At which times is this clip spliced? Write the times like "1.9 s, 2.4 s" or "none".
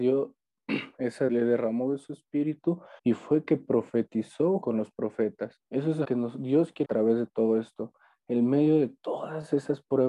1.3 s, 3.0 s, 4.6 s, 5.7 s, 6.0 s, 6.8 s